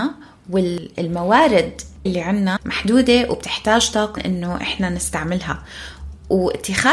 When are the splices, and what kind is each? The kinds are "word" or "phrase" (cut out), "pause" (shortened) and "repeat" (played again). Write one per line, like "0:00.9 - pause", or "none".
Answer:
0:02.1 - word
0:02.6 - word
0:04.2 - word